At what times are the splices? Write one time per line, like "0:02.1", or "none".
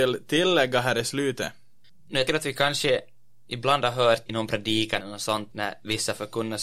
0:02.3
0:04.3
0:05.0
0:05.5